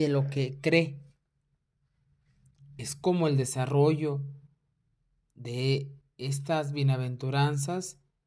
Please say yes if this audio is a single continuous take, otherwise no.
yes